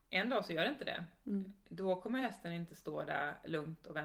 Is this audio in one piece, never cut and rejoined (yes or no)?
yes